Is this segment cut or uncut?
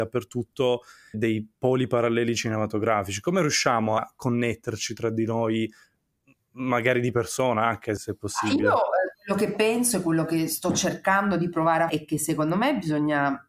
cut